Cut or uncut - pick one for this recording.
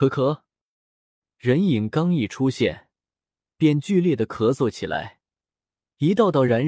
uncut